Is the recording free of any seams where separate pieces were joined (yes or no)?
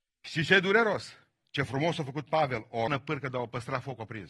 no